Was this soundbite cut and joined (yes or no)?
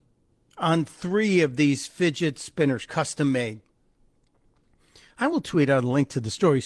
no